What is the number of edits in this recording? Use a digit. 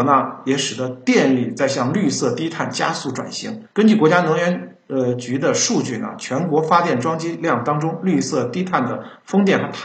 1